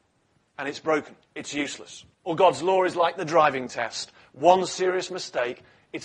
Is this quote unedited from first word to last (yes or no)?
no